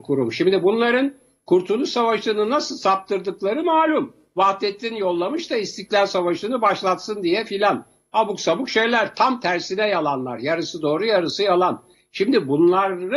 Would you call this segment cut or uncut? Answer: uncut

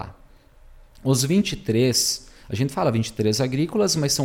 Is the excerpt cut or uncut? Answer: uncut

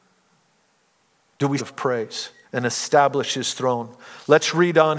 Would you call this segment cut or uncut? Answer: cut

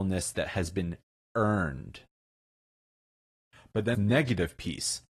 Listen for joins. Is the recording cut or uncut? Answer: cut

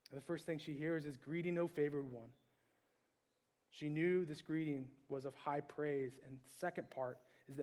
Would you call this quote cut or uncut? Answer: uncut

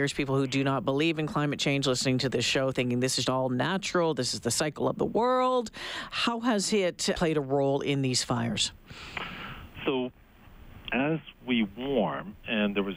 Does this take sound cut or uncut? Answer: cut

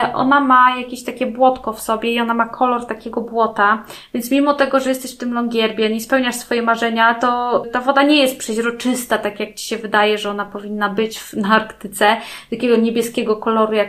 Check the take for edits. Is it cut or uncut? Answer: uncut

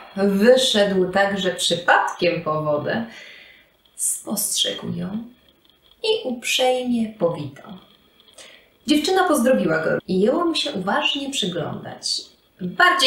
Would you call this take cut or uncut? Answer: cut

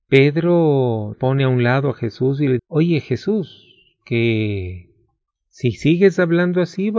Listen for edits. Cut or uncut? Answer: cut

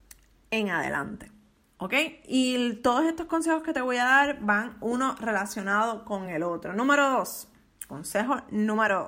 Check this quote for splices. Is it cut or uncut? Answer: uncut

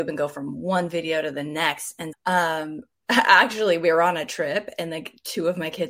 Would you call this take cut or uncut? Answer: cut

